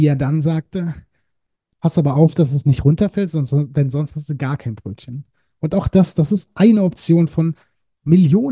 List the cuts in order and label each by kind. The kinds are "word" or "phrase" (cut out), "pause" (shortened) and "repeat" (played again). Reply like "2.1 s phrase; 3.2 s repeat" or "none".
none